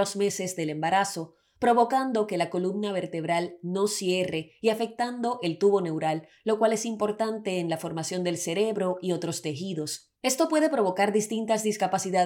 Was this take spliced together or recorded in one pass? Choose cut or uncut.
cut